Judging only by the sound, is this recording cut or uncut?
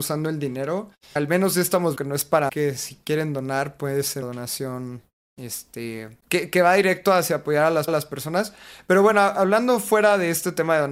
cut